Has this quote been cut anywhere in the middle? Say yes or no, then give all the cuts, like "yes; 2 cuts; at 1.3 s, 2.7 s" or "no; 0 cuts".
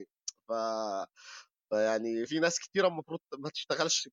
yes; 1 cut; at 2.3 s